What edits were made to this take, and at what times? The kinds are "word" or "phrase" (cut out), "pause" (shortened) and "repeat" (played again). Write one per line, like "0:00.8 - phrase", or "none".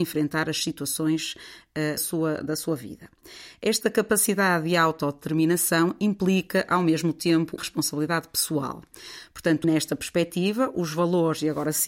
0:02.0 - word
0:07.6 - word
0:09.6 - word